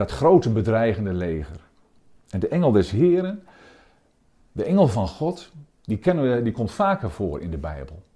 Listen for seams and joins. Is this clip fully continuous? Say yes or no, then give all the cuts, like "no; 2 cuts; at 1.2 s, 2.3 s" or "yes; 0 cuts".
yes; 0 cuts